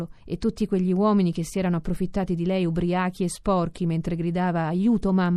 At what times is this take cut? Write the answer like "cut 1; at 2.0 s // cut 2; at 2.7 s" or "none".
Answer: none